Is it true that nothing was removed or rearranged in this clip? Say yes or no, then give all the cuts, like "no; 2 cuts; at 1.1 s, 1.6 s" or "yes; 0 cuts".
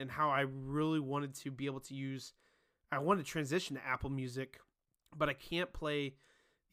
no; 1 cut; at 4.7 s